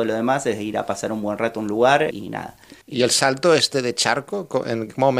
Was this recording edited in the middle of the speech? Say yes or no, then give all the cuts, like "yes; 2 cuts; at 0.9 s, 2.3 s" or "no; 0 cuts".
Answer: yes; 2 cuts; at 2.1 s, 2.8 s